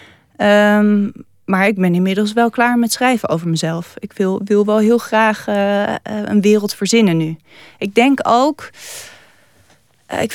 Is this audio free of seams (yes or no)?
yes